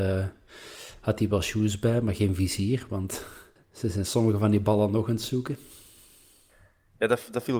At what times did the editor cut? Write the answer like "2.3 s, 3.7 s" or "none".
3.6 s

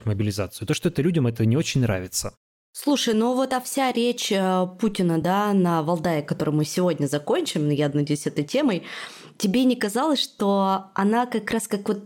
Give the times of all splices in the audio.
none

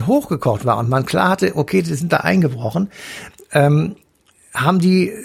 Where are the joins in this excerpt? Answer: none

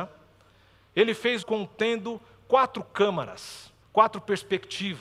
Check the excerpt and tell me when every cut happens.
1.4 s, 3.8 s

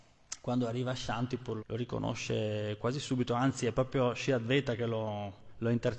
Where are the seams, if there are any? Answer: 1.6 s

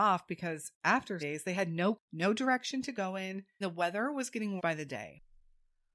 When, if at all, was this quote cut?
1.2 s, 1.9 s, 3.6 s, 4.6 s

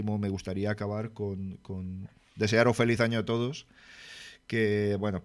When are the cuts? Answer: none

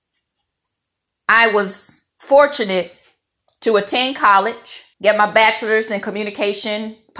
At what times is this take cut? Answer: 2.1 s, 4.9 s

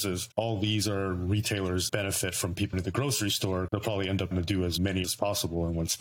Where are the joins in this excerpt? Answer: 1.9 s, 2.7 s, 3.7 s, 4.3 s, 5.0 s

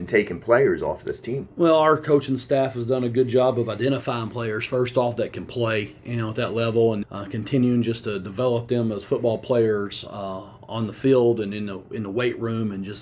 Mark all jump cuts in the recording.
7.0 s

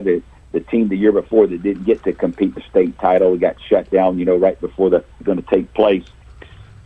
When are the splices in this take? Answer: 2.6 s, 5.2 s

